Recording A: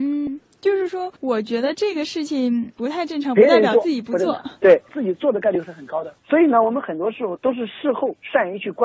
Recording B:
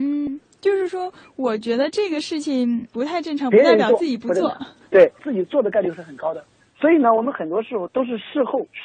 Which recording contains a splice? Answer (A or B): A